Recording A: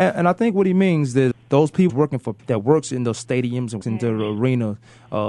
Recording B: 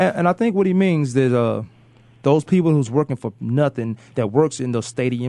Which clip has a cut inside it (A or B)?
A